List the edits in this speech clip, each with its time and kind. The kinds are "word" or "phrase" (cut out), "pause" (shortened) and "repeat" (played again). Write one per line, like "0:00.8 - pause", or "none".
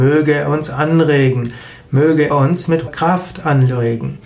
0:02.3 - word
0:02.9 - word